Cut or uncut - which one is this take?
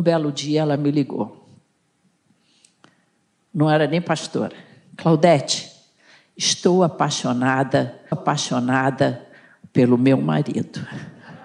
cut